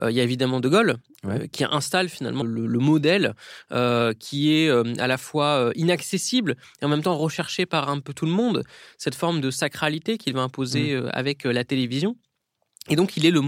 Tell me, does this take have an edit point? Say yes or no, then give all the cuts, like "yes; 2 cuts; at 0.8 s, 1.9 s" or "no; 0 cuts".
yes; 1 cut; at 2.4 s